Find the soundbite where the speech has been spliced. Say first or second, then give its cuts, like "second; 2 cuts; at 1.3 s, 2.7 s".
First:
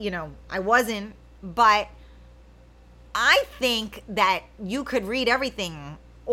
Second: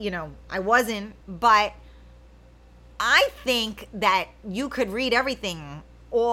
second; 1 cut; at 1.2 s